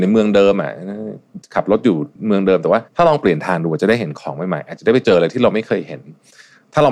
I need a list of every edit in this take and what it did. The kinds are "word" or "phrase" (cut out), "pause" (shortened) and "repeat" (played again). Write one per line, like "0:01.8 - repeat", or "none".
0:02.9 - pause